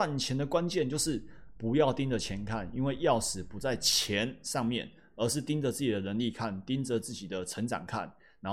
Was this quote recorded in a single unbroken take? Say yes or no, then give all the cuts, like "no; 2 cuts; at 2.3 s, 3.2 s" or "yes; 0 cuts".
yes; 0 cuts